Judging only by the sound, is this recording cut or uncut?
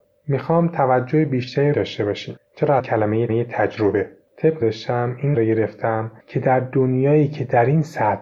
cut